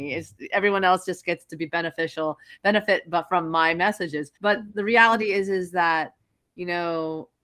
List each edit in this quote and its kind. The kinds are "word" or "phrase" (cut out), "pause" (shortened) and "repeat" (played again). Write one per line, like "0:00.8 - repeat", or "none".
0:04.4 - pause